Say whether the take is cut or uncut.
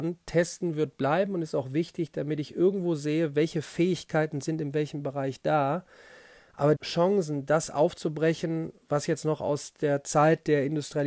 cut